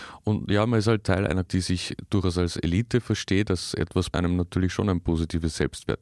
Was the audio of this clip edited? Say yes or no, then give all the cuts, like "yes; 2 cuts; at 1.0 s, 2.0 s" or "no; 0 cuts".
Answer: yes; 2 cuts; at 1.5 s, 4.1 s